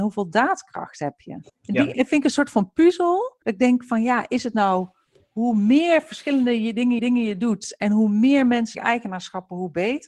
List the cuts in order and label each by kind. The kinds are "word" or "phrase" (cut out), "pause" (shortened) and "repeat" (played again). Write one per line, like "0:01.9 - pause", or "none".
0:01.5 - pause
0:03.4 - pause
0:05.1 - pause
0:07.0 - repeat
0:08.7 - word